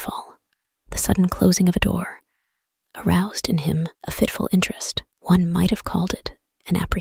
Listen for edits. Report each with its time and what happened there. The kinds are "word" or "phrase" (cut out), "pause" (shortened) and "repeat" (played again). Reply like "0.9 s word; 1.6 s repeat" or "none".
3.9 s pause; 5.1 s pause